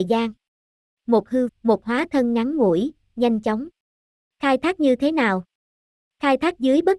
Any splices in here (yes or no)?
yes